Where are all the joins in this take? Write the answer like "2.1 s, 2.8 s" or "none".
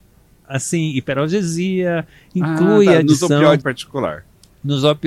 3.6 s